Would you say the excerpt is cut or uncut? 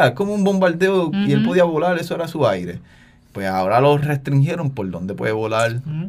cut